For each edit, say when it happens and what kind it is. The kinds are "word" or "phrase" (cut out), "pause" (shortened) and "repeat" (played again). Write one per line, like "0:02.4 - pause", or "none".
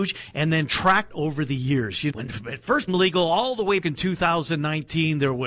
0:01.1 - word
0:02.1 - word
0:02.9 - word
0:03.8 - word